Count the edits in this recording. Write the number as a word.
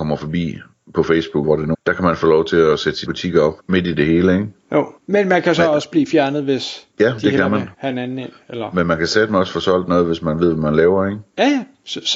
seven